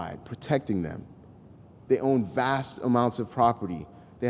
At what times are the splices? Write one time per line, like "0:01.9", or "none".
none